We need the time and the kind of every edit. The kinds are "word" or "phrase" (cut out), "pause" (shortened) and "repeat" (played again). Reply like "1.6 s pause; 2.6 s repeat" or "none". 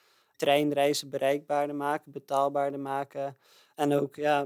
none